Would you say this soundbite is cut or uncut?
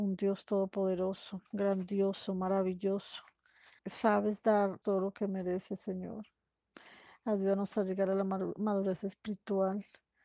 cut